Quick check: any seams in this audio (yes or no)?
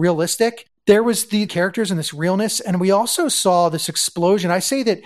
yes